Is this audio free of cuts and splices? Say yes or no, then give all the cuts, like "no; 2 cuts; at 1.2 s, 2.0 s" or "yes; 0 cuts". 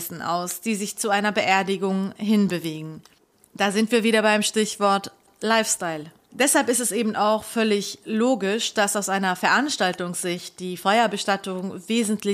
yes; 0 cuts